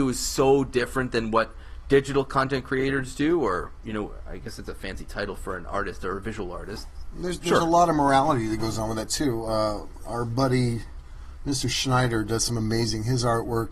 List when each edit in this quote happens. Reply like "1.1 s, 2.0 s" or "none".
10.0 s